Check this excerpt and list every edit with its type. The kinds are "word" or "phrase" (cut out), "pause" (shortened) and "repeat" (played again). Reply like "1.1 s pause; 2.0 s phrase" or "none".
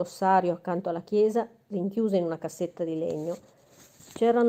none